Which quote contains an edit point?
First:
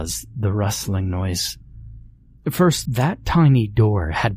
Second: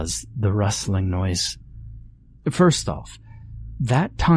first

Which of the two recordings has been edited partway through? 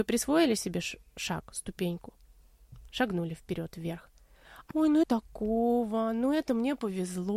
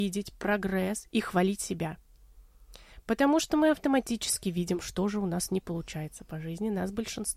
first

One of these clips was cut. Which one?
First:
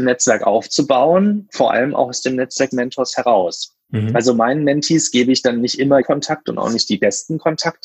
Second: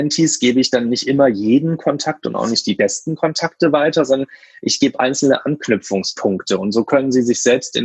first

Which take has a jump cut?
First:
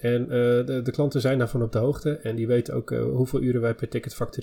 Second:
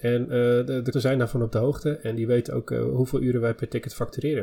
second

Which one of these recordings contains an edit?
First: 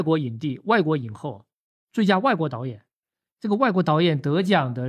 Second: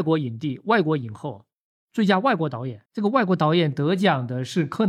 second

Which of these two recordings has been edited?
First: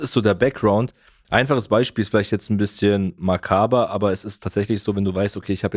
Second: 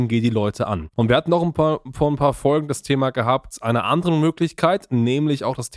second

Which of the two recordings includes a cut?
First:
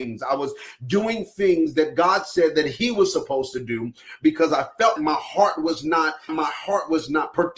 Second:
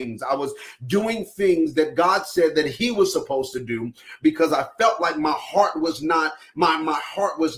first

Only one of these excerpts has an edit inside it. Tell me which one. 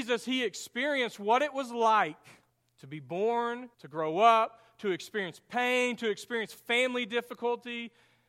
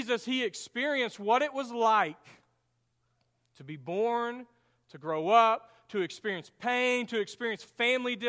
first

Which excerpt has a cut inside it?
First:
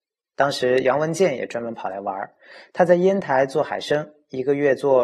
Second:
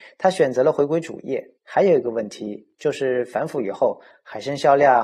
second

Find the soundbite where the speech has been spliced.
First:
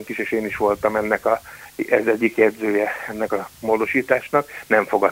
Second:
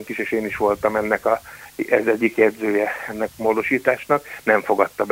second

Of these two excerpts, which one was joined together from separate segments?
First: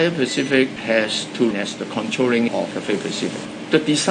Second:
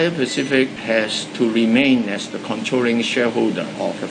first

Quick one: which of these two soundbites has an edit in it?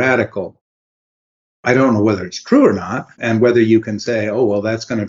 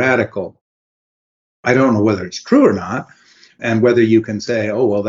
first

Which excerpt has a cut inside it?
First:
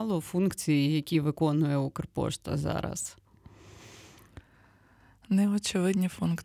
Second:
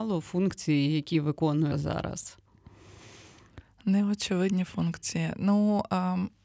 second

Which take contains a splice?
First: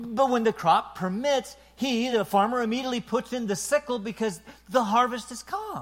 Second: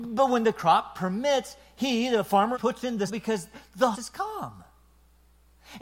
second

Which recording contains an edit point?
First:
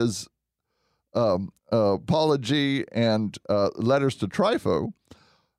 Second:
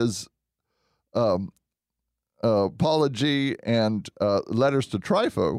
first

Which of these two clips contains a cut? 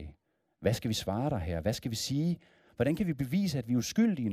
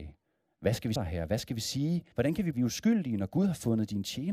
second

